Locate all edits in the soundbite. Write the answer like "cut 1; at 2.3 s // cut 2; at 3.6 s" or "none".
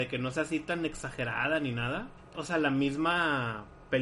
cut 1; at 2.3 s